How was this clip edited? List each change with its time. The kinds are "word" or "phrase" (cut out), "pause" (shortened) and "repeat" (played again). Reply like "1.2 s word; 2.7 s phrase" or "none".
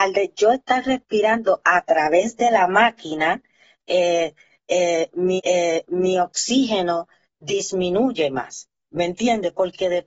5.4 s repeat